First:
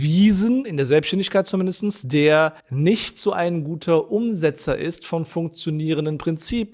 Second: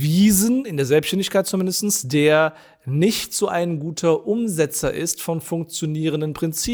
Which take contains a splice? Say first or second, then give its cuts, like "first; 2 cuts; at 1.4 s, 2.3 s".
first; 1 cut; at 2.6 s